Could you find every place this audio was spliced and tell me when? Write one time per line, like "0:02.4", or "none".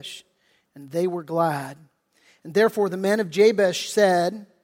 none